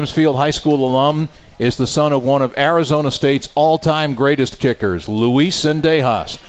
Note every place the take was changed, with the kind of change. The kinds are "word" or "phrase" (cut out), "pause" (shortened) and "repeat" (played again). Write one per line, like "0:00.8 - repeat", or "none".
none